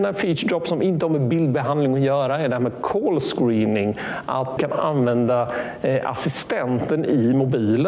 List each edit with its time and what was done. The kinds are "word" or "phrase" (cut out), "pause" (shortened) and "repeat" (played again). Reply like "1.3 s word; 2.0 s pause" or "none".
4.6 s word